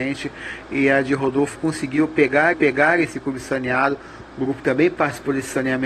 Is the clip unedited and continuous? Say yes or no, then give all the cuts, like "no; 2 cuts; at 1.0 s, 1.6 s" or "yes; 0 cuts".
no; 3 cuts; at 1.5 s, 2.5 s, 4.6 s